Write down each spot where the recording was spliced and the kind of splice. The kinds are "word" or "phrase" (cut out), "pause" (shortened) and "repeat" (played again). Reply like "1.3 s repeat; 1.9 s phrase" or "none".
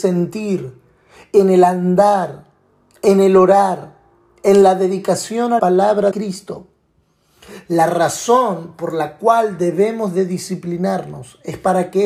5.6 s word; 6.1 s word